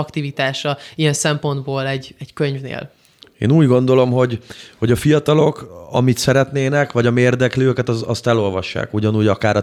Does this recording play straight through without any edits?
yes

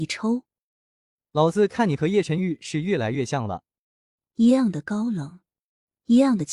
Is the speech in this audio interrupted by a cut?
no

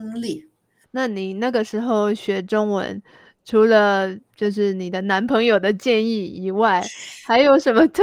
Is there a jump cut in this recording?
no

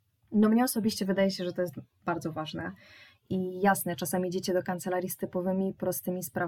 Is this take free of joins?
yes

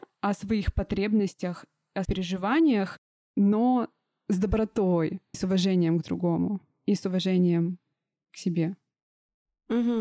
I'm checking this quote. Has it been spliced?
yes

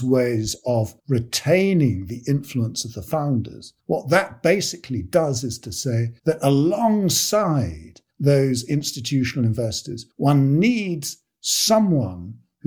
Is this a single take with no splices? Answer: no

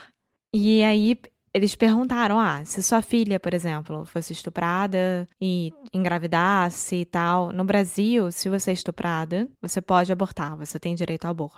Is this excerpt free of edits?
no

